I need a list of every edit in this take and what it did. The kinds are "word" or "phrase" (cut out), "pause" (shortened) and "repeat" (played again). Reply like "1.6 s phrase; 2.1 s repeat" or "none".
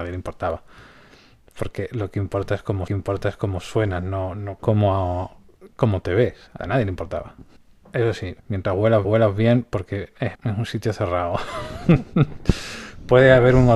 2.9 s repeat; 4.6 s phrase; 6.6 s phrase; 7.6 s pause; 8.4 s pause; 9.0 s repeat; 10.3 s phrase